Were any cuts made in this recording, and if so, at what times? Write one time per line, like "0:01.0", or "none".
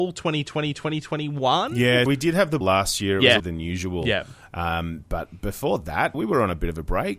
0:02.1
0:02.6
0:03.4
0:06.1

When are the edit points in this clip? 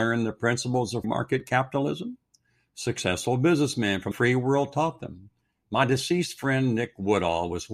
0:01.0
0:04.1

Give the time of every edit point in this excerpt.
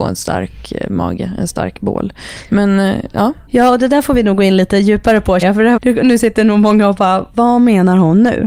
0:03.5
0:05.4
0:05.8

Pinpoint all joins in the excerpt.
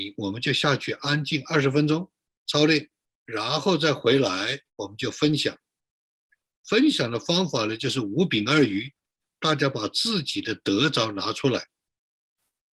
0:03.1
0:04.7

